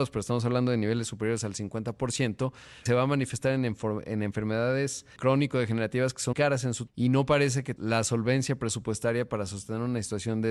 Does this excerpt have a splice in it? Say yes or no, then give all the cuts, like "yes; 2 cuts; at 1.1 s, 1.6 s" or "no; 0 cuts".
yes; 5 cuts; at 2.9 s, 5.2 s, 6.3 s, 6.9 s, 7.8 s